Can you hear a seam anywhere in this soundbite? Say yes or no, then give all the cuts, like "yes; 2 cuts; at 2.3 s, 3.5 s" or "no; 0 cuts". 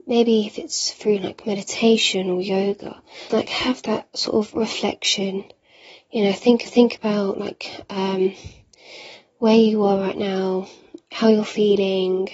yes; 2 cuts; at 3.3 s, 6.7 s